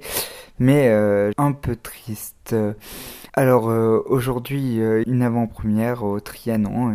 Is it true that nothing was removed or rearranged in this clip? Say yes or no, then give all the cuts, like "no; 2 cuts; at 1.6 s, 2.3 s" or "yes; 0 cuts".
no; 3 cuts; at 1.3 s, 3.3 s, 5.0 s